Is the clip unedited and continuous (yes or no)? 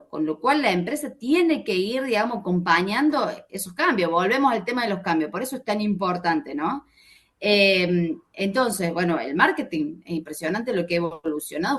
yes